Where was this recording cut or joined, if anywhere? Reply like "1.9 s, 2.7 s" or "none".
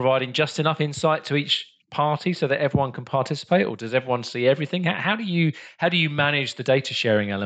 1.8 s